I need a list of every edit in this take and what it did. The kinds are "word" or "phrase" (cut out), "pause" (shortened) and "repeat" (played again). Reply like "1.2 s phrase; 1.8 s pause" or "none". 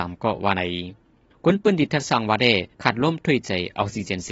2.7 s pause